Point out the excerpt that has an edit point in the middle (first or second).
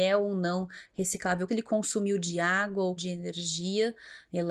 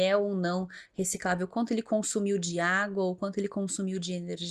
first